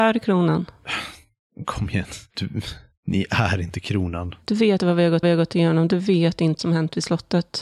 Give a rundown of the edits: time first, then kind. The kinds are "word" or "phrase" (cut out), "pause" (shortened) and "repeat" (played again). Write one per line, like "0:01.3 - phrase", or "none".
0:04.8 - word
0:05.2 - repeat
0:06.6 - word